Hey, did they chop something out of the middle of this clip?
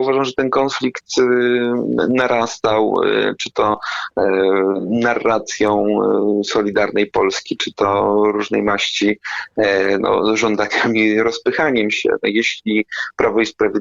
no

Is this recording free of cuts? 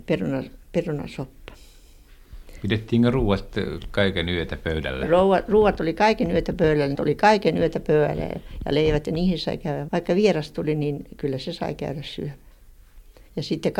no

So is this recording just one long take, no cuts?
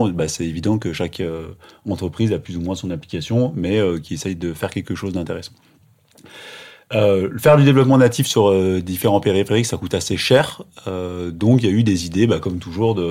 yes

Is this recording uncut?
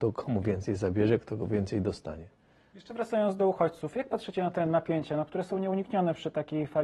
yes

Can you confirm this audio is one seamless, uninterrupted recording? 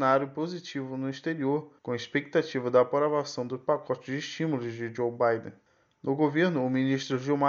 no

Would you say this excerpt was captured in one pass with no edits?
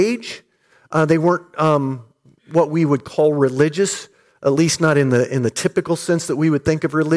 yes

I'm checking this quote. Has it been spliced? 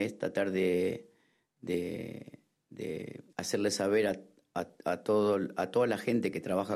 yes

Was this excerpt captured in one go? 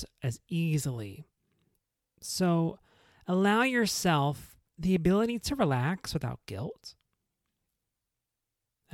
no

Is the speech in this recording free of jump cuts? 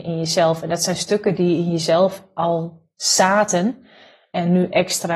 yes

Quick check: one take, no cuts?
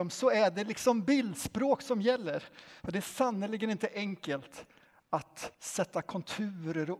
no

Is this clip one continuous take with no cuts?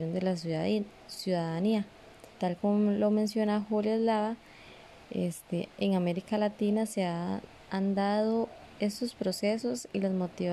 no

